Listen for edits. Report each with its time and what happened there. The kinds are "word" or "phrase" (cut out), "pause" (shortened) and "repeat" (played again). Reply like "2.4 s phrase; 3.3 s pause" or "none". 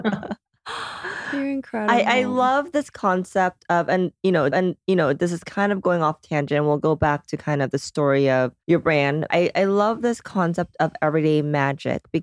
4.5 s repeat; 8.6 s pause; 9.3 s word